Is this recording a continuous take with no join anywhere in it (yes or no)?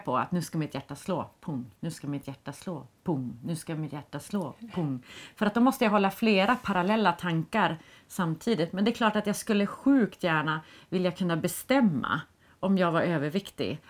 yes